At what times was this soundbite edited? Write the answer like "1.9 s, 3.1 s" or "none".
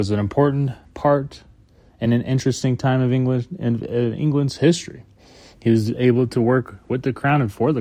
none